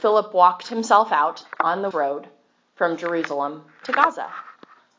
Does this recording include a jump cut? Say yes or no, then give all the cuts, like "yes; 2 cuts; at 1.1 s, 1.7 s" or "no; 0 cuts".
yes; 1 cut; at 1.9 s